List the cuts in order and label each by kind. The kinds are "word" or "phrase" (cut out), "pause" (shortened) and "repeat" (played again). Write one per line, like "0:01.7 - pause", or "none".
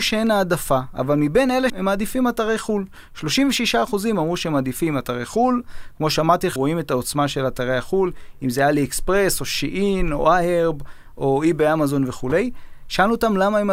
0:01.7 - word
0:06.6 - word